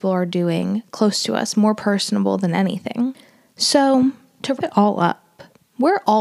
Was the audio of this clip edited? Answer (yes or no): yes